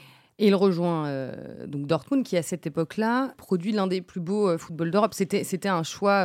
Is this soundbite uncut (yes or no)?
yes